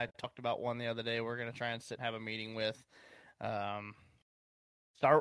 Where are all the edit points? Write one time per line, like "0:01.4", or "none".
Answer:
0:02.0